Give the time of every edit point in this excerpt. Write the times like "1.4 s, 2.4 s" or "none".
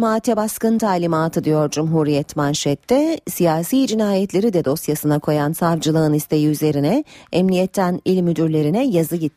none